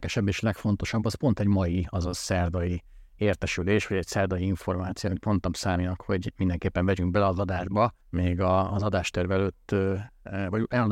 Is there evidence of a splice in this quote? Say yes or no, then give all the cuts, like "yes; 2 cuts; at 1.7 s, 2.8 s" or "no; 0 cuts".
yes; 1 cut; at 8.0 s